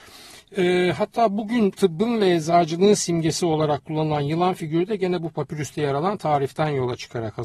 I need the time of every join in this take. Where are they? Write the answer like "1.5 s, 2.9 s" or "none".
none

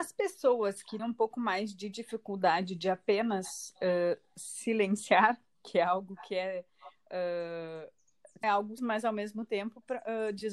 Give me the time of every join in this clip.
1.0 s, 8.4 s, 8.8 s

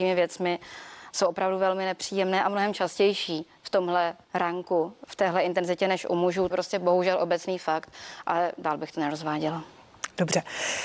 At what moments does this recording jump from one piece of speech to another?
4.2 s, 6.5 s

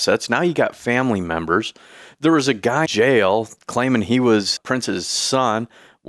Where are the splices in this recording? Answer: 2.9 s, 4.6 s

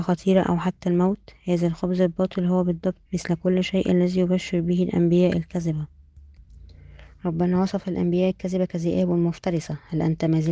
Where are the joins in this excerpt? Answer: 3.1 s

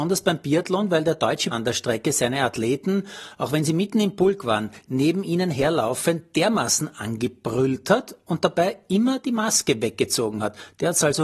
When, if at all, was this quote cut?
1.5 s

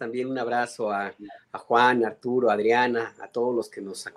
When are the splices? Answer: none

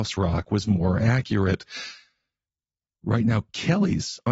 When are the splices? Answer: none

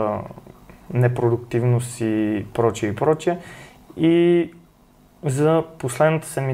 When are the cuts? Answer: none

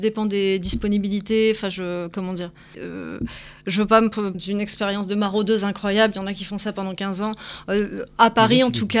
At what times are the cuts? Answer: 2.7 s, 4.3 s

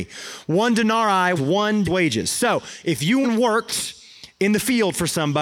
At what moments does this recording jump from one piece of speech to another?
1.4 s, 1.8 s, 3.2 s

